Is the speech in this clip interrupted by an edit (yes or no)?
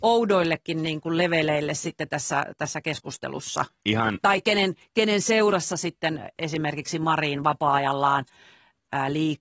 no